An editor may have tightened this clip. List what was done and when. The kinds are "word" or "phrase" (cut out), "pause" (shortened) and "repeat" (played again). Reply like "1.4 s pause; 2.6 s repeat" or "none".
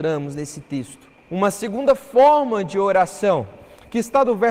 1.2 s pause